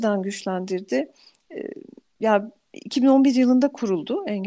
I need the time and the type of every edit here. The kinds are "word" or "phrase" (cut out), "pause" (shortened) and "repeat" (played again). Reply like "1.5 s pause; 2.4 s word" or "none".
none

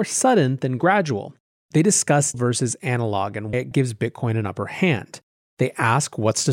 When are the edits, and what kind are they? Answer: 2.3 s word; 3.5 s word

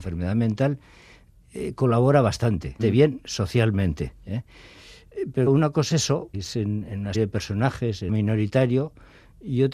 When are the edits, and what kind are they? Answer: 2.8 s word; 5.5 s word; 5.9 s word; 6.3 s word; 7.1 s word; 8.1 s word

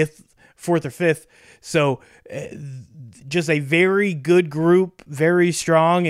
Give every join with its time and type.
none

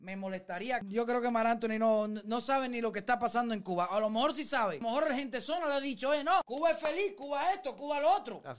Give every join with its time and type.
none

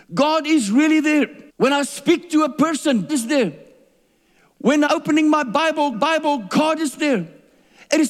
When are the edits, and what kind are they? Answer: 1.5 s pause; 3.1 s word; 4.9 s word; 5.9 s repeat

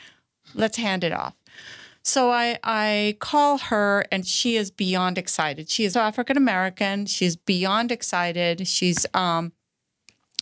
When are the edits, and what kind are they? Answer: 5.9 s word

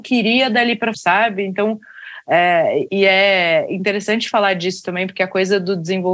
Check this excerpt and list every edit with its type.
0.9 s word; 2.9 s word

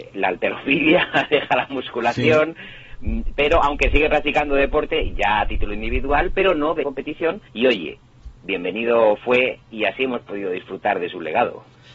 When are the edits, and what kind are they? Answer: 6.8 s word; 7.5 s pause

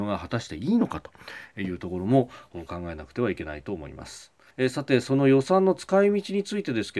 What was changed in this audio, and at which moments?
4.5 s pause

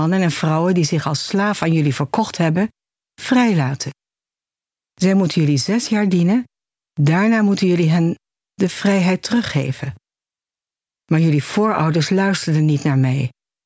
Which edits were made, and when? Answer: none

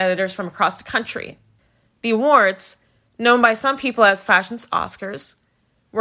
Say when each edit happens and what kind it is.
none

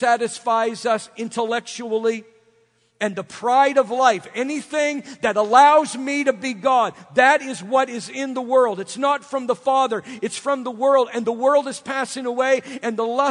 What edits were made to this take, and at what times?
none

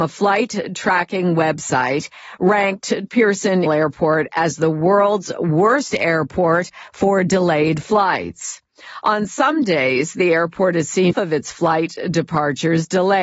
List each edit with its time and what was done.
3.1 s word; 3.7 s word; 11.1 s phrase

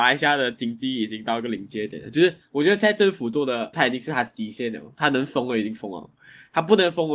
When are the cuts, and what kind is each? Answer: 3.7 s word

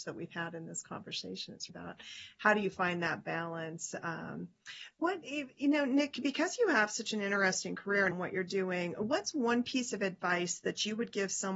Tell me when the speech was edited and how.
1.7 s word; 4.9 s pause; 8.1 s word

